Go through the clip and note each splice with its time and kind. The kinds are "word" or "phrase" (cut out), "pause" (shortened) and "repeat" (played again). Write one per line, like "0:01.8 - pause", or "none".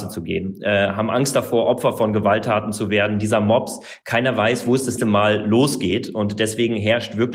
0:05.0 - word